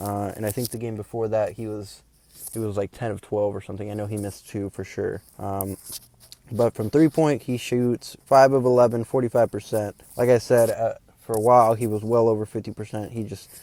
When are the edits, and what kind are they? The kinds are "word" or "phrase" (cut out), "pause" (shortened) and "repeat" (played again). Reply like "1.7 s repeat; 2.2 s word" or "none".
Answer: 5.3 s pause; 10.0 s pause